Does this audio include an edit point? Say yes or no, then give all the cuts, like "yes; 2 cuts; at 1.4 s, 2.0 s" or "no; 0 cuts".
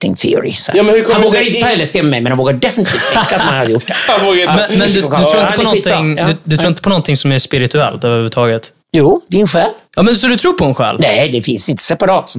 yes; 2 cuts; at 8.8 s, 9.9 s